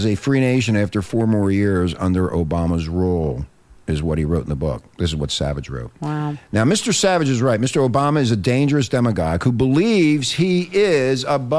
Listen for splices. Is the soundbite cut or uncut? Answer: uncut